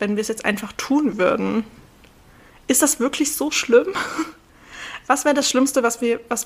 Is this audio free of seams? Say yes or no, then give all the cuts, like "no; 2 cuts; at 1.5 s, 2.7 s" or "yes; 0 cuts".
yes; 0 cuts